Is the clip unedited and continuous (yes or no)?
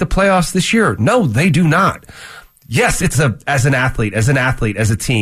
no